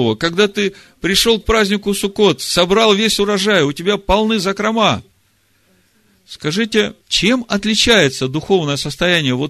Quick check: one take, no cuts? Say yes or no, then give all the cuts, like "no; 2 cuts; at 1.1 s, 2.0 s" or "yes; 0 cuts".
no; 1 cut; at 7.0 s